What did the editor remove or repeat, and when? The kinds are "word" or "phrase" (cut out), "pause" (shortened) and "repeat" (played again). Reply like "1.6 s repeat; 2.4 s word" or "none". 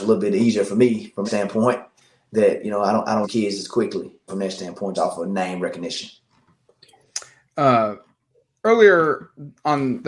1.2 s word; 3.2 s word; 4.3 s phrase; 4.9 s word